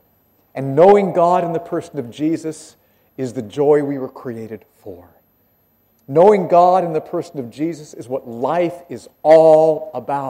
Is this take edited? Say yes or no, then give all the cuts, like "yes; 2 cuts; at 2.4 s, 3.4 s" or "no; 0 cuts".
no; 0 cuts